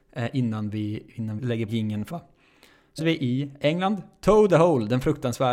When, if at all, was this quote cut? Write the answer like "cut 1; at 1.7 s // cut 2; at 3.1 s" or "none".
cut 1; at 1.4 s // cut 2; at 1.7 s // cut 3; at 2.1 s // cut 4; at 3.0 s // cut 5; at 4.5 s

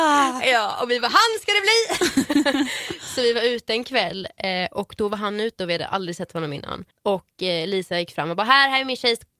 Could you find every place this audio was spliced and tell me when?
none

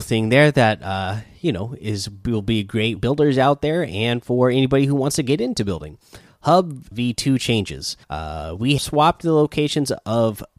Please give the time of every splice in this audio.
cut 1; at 3.0 s // cut 2; at 6.9 s // cut 3; at 8.0 s // cut 4; at 8.8 s

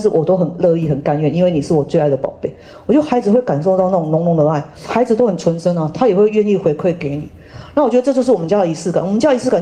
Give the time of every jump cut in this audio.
cut 1; at 4.7 s

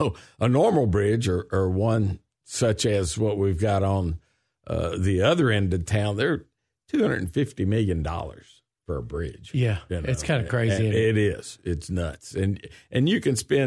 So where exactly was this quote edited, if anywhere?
none

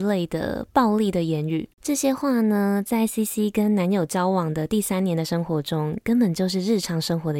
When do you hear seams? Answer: cut 1; at 1.7 s

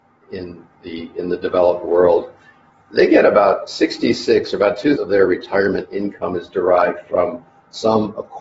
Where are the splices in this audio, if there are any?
cut 1; at 5.0 s

